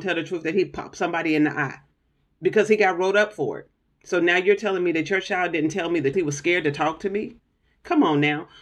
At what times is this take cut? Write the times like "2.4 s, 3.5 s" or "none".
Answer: 6.1 s